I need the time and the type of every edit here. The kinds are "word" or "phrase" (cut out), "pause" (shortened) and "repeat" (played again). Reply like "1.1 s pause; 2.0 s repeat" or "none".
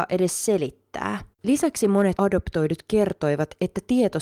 1.3 s pause; 2.2 s word